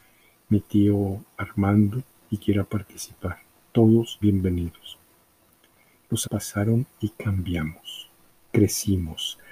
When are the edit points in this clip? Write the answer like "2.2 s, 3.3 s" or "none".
2.4 s, 4.2 s, 6.2 s